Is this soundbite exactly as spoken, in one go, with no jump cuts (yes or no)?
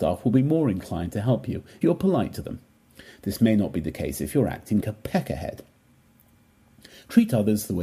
no